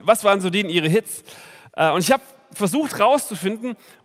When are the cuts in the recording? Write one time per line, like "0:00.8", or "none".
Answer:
none